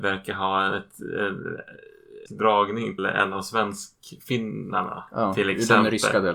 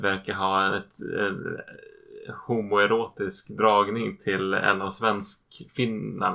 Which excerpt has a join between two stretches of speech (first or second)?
first